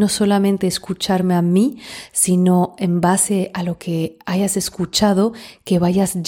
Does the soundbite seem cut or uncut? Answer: uncut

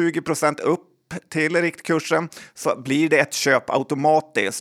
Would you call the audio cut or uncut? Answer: uncut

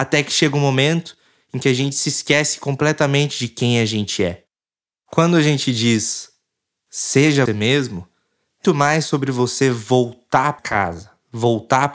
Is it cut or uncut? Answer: cut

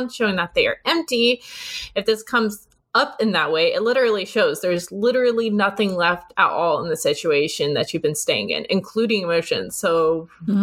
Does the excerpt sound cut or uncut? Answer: uncut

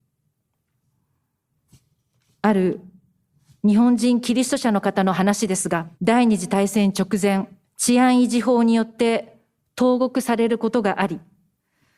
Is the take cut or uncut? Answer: cut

